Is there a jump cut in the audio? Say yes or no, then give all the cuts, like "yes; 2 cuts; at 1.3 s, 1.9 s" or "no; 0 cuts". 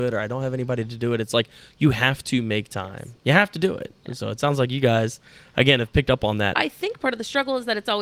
no; 0 cuts